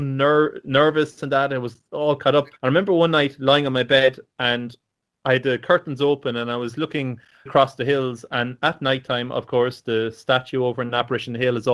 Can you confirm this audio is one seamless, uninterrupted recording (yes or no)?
no